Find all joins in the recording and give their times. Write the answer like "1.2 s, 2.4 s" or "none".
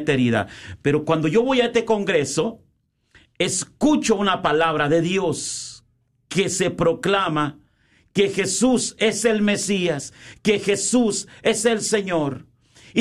none